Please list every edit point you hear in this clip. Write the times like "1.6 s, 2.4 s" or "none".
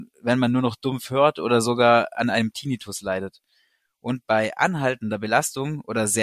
none